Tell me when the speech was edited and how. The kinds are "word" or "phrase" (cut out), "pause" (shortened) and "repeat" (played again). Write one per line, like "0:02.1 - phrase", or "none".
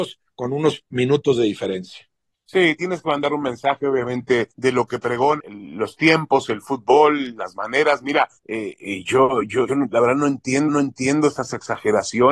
0:02.3 - pause
0:04.5 - pause
0:05.4 - word
0:08.4 - pause
0:09.7 - word
0:10.7 - repeat